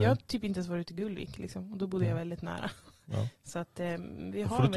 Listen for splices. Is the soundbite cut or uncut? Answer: uncut